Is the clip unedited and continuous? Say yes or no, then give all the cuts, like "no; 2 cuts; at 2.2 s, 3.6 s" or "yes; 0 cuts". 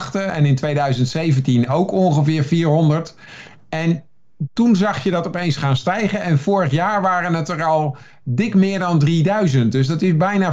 yes; 0 cuts